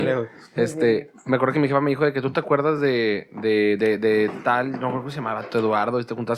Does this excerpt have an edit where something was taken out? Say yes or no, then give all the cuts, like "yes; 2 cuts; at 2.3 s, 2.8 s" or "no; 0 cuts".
no; 0 cuts